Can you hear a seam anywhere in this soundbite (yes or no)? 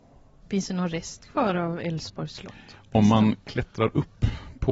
no